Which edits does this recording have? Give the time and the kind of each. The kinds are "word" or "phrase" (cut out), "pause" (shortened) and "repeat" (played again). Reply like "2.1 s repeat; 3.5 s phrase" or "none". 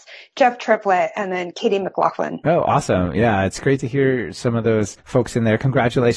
5.0 s pause